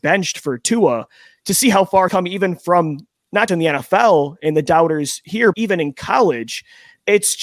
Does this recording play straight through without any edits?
no; 3 cuts; at 2.1 s, 3.5 s, 5.5 s

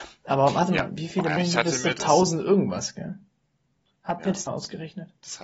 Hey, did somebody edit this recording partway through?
yes; 2 cuts; at 1.4 s, 4.5 s

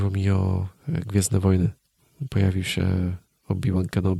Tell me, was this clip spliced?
no; 0 cuts

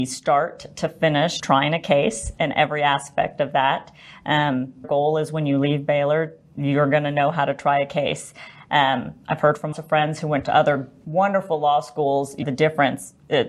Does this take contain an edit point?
yes; 4 cuts; at 1.4 s, 4.8 s, 9.7 s, 12.4 s

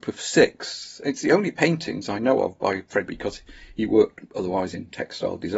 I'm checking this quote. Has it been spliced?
yes; 1 cut; at 3.1 s

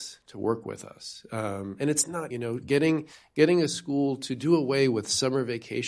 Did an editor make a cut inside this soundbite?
yes; 1 cut; at 2.3 s

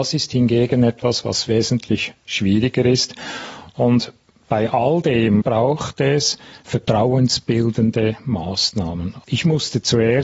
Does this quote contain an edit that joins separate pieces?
no; 0 cuts

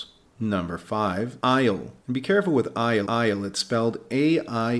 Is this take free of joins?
no; 3 cuts; at 1.4 s, 2.0 s, 3.1 s

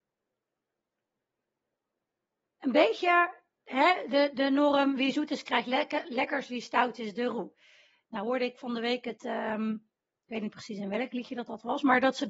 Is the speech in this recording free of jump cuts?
yes; 0 cuts

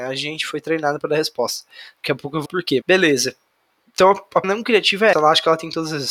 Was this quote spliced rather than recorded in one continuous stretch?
yes; 4 cuts; at 2.5 s, 2.8 s, 4.4 s, 5.1 s

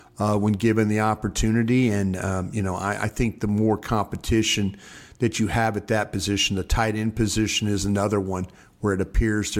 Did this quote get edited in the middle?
no; 0 cuts

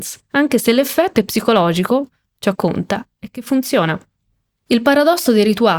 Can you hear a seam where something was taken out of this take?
yes; 1 cut; at 2.5 s

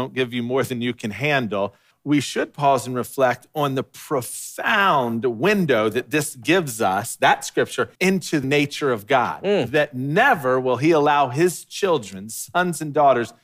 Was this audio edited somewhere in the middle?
yes; 3 cuts; at 1.9 s, 7.9 s, 8.4 s

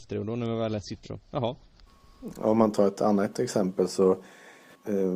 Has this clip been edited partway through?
yes; 1 cut; at 1.0 s

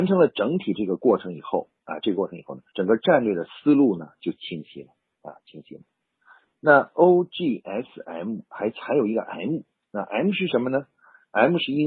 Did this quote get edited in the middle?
yes; 1 cut; at 2.7 s

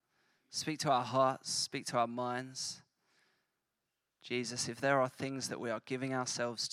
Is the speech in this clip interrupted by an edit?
no; 0 cuts

